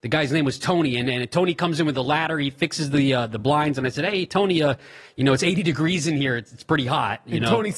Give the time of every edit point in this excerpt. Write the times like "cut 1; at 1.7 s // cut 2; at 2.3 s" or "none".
none